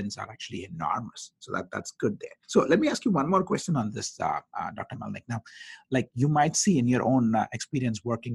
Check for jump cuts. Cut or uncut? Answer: cut